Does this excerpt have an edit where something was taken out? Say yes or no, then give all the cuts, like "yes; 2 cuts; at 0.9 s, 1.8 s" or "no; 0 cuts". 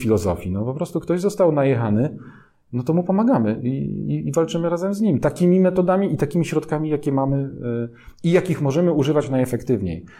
no; 0 cuts